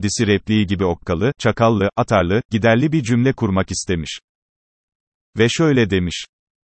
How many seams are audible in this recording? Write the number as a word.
one